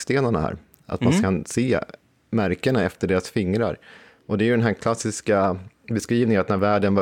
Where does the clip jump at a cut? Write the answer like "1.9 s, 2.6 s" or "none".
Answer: none